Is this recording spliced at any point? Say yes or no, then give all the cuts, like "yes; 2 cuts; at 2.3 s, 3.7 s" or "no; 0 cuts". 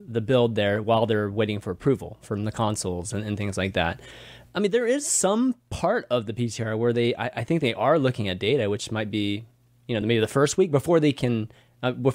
no; 0 cuts